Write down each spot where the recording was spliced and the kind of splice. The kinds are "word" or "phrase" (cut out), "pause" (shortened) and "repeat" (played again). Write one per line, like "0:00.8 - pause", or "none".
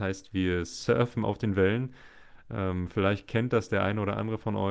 none